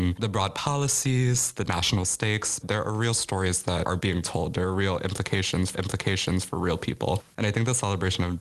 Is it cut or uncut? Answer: cut